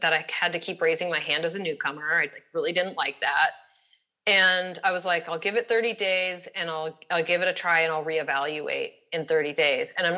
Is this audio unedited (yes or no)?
yes